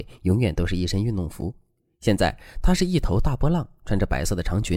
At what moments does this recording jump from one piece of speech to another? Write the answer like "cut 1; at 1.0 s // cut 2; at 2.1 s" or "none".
none